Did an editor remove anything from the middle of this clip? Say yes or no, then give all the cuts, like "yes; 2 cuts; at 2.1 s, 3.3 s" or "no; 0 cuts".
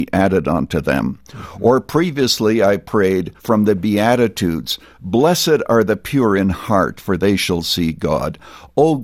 yes; 1 cut; at 3.4 s